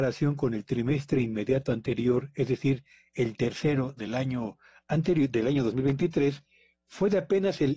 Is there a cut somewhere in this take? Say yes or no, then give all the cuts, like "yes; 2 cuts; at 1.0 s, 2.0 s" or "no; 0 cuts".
no; 0 cuts